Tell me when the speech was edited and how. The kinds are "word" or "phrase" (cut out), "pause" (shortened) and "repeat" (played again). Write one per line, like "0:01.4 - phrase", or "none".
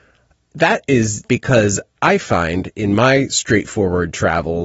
0:01.3 - word